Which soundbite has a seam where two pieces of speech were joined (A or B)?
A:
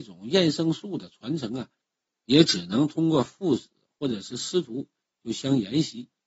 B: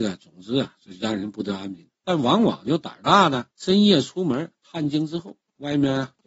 B